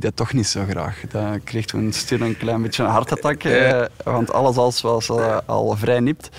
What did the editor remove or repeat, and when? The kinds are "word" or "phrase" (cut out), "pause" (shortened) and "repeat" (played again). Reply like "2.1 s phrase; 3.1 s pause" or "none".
none